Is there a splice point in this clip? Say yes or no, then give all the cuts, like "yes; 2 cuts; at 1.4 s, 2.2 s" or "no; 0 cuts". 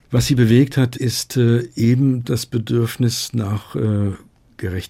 no; 0 cuts